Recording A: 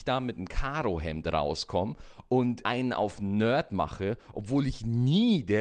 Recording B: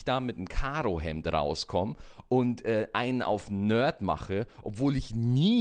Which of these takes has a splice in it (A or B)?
A